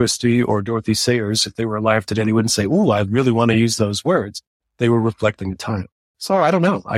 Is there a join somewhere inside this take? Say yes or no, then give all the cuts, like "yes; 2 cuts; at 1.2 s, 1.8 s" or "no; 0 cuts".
no; 0 cuts